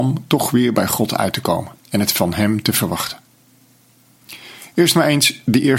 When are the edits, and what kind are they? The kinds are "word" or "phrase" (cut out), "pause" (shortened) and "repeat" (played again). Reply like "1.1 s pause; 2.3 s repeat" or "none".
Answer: 1.8 s pause